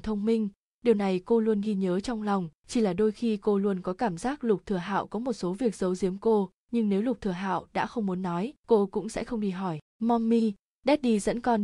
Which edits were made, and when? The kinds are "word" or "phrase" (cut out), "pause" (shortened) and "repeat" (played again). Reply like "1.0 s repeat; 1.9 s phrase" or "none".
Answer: 2.6 s pause; 6.6 s pause; 8.6 s pause; 9.8 s pause